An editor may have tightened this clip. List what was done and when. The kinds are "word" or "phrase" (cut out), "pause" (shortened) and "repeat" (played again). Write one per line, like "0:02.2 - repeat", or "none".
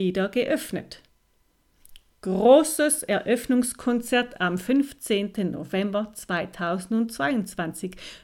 none